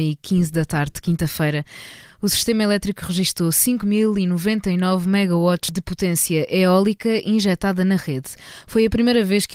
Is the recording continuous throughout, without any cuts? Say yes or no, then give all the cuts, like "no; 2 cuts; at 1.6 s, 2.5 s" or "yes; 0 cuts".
yes; 0 cuts